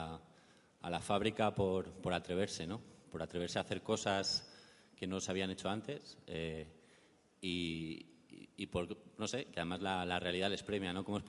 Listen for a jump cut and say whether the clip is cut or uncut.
uncut